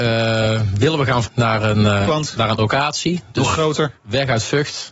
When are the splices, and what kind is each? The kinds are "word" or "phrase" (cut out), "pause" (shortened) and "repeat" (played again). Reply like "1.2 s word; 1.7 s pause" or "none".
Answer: 1.2 s word; 2.1 s word; 2.6 s word